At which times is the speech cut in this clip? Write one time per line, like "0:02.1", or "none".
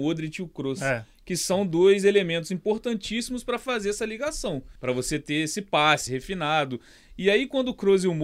0:04.8
0:06.1

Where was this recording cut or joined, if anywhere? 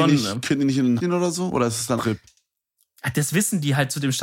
0:01.0
0:02.0

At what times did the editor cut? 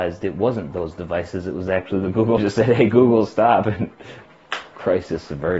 0:02.4

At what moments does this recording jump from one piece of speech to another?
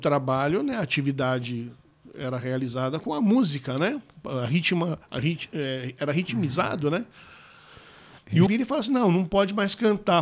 0:03.0
0:08.5

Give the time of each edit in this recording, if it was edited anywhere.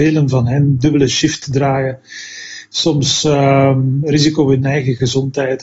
0:04.0

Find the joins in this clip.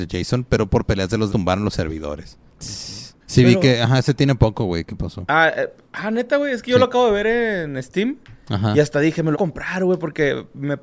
0:01.3
0:02.5
0:03.2
0:05.9
0:09.3

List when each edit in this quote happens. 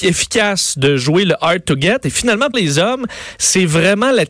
0:02.5

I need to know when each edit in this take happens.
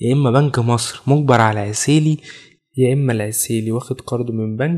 none

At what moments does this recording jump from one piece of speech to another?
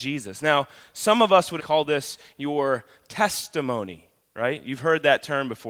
0:01.6

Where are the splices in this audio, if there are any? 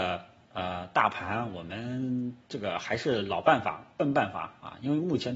0:02.4

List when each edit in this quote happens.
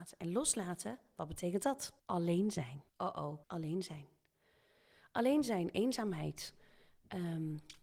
0:02.0
0:02.9
0:03.4

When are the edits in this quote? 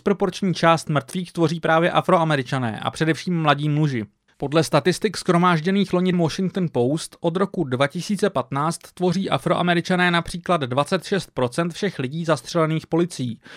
0:04.3
0:06.1

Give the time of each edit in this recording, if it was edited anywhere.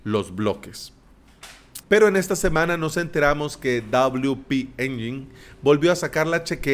0:01.8

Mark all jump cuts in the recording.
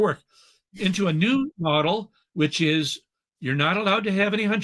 none

